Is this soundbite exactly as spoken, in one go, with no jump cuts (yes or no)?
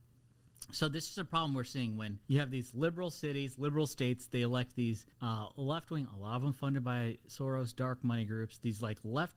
no